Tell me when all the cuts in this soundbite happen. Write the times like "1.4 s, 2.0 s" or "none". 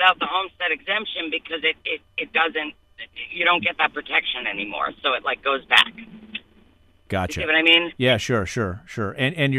none